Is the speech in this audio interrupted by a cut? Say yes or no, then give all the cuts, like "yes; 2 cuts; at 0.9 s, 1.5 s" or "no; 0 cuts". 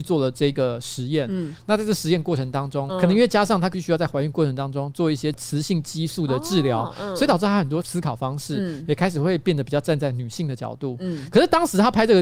no; 0 cuts